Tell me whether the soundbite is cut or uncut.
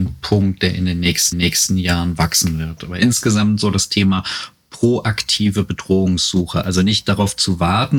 cut